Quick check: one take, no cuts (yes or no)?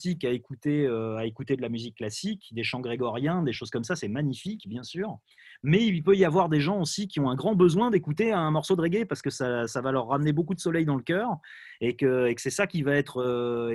yes